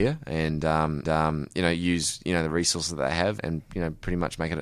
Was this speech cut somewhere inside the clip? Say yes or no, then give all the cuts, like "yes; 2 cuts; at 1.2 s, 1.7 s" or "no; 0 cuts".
yes; 2 cuts; at 1.0 s, 3.4 s